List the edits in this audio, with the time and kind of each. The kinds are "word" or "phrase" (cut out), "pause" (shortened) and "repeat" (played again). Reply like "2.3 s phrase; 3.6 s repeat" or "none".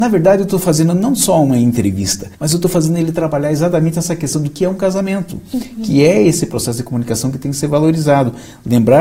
2.3 s pause